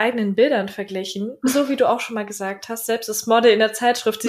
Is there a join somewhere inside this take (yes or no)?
no